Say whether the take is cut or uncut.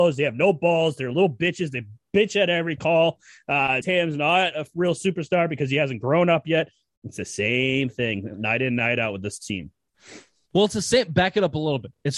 cut